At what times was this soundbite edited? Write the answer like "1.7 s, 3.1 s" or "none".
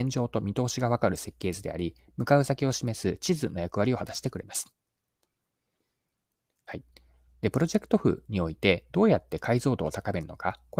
none